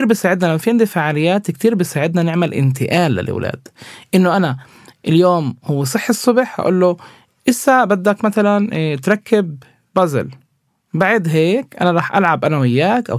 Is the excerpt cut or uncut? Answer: uncut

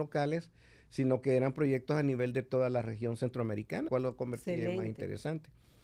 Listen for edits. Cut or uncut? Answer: cut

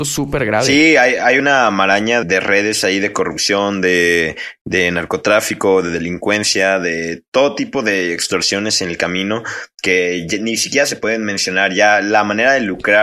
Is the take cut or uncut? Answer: cut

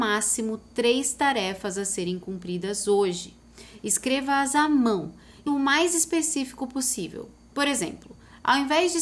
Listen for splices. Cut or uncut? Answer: cut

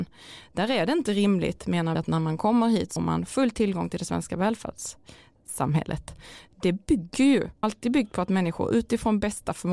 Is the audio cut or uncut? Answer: cut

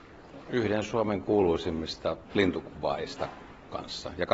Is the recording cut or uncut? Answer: cut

